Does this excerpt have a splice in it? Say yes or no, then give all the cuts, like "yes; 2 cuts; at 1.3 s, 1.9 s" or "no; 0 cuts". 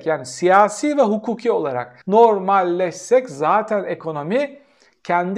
yes; 1 cut; at 2.0 s